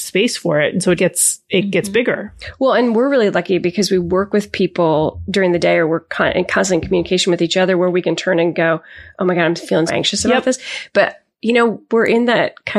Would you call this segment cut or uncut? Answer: cut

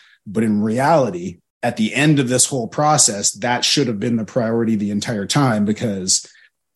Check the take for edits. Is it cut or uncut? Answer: cut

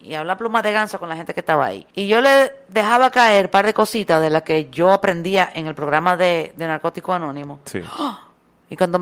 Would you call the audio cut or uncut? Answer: cut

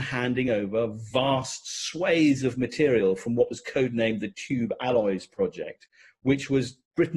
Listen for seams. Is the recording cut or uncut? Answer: uncut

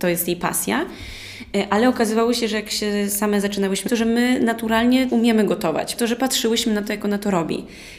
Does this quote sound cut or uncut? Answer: cut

